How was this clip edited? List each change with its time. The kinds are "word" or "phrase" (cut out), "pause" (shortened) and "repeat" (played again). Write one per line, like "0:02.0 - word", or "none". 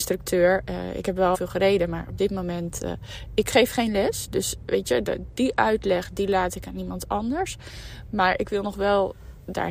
0:01.3 - phrase